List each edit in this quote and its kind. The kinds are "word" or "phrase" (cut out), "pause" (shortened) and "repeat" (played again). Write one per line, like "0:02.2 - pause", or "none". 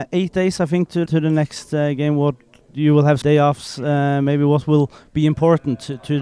0:01.1 - word
0:03.2 - word